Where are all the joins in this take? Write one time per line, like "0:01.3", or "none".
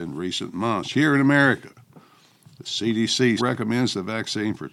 0:03.4